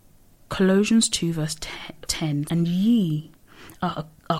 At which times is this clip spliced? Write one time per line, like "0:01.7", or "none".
0:02.1
0:02.5